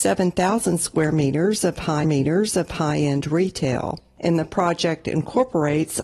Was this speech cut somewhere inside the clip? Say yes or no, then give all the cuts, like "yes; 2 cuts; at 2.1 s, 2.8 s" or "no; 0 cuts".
yes; 1 cut; at 2.0 s